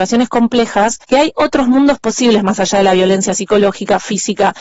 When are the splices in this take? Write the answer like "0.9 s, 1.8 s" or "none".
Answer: 1.0 s